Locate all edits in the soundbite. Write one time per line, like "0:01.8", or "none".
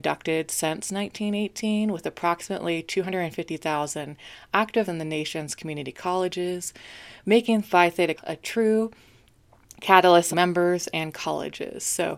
0:04.9
0:08.2
0:10.3